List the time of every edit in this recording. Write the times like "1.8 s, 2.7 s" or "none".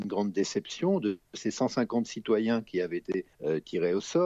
3.3 s